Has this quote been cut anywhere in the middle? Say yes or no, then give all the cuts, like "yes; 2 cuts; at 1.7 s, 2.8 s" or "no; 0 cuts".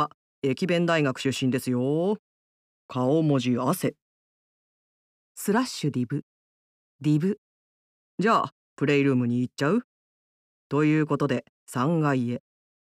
no; 0 cuts